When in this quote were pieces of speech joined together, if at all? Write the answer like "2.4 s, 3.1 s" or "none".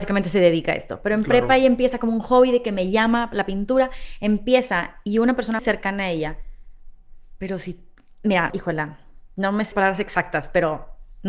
5.6 s, 8.5 s, 9.7 s